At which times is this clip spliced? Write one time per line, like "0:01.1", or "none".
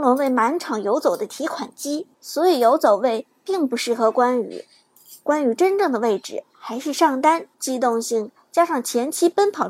0:02.1
0:07.5

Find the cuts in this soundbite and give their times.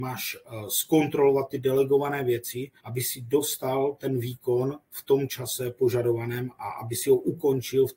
0:02.8

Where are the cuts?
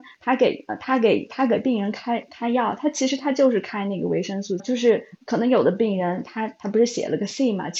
0:04.6

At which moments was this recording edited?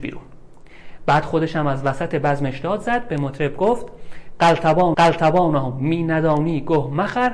0:04.9

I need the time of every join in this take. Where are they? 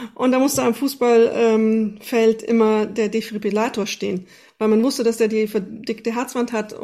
none

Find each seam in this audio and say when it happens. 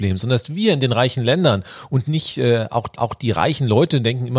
0:03.0

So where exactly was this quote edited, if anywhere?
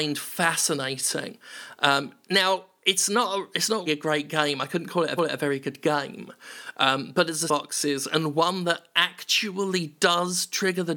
0:03.9
0:05.2
0:07.5

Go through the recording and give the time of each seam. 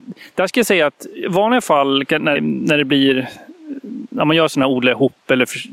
0:02.3

